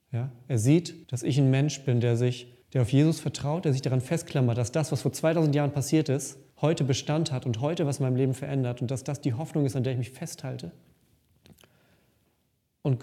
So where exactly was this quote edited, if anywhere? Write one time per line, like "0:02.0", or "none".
0:01.0
0:02.6
0:06.5